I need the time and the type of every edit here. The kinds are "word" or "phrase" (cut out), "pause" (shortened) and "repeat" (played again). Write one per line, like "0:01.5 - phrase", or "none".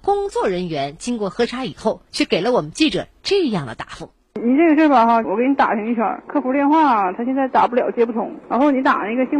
none